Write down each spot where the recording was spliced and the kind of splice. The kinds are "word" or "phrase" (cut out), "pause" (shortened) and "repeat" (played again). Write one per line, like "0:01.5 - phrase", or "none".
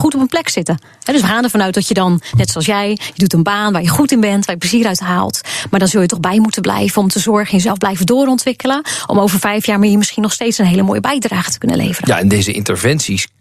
none